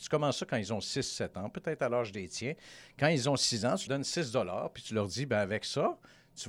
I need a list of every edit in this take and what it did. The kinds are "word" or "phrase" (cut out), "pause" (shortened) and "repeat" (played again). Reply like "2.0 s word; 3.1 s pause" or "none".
3.9 s word